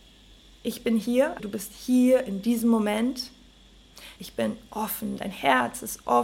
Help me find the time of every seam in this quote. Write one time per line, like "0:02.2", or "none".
0:01.4
0:04.2